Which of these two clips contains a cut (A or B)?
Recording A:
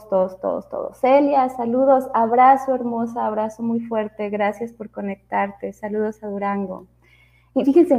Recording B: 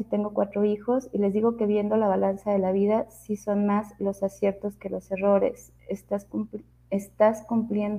B